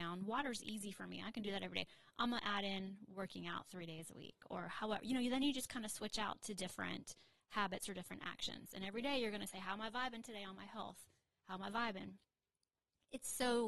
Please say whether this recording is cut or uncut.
uncut